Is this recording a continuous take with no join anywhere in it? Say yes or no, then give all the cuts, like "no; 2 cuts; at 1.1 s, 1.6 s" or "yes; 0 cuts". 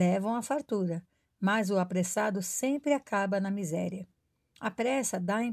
yes; 0 cuts